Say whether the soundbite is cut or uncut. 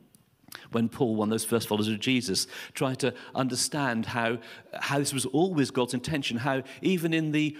uncut